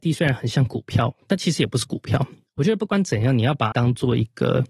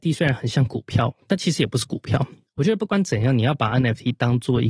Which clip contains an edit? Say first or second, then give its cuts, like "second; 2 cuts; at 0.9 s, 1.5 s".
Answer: first; 1 cut; at 3.7 s